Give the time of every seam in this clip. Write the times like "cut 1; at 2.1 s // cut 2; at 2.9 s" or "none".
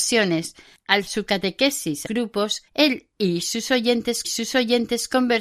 cut 1; at 1.1 s // cut 2; at 2.1 s // cut 3; at 2.7 s // cut 4; at 4.2 s